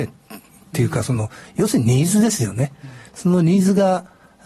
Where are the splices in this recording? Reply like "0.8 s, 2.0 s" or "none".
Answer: 3.1 s